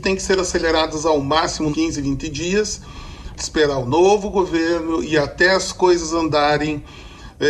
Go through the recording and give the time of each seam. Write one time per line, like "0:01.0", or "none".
0:01.7
0:03.4